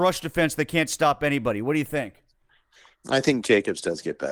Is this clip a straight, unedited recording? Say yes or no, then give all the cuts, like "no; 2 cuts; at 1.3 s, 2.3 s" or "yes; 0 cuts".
yes; 0 cuts